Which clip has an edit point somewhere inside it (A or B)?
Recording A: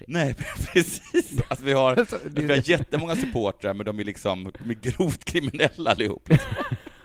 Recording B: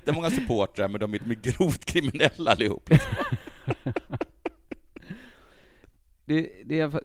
B